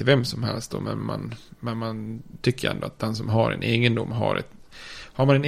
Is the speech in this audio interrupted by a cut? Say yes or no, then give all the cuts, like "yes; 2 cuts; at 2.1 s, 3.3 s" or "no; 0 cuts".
no; 0 cuts